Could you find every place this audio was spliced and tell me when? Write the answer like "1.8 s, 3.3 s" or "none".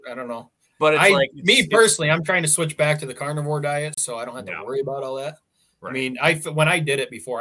none